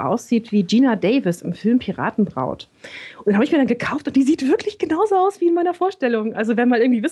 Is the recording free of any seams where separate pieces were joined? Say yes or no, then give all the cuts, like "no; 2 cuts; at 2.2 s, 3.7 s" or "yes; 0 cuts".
yes; 0 cuts